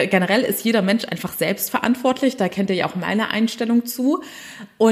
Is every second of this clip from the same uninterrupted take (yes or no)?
yes